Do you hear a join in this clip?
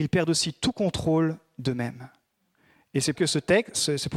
yes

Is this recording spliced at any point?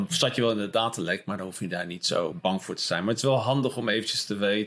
yes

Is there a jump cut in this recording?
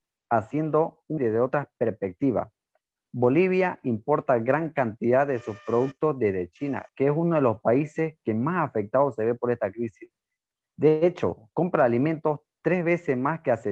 yes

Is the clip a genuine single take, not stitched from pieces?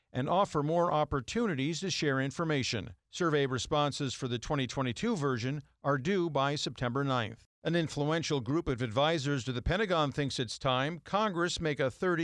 no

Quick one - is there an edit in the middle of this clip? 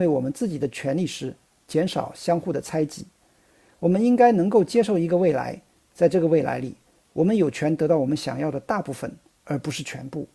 no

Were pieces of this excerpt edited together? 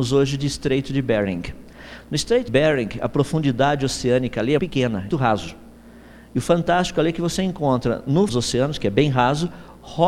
yes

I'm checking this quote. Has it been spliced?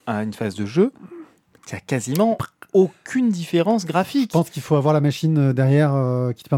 no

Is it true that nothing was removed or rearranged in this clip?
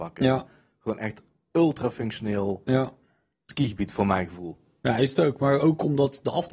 yes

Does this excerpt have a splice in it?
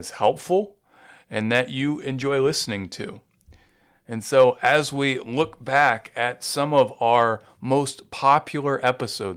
no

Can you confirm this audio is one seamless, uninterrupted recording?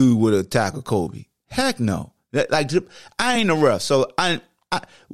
yes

